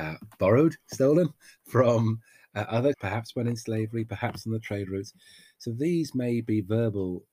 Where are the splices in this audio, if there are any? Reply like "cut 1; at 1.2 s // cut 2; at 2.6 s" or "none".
cut 1; at 2.9 s

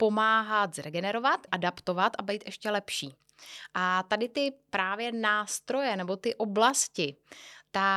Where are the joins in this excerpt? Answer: cut 1; at 1.5 s

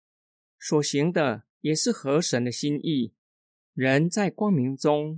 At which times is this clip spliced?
none

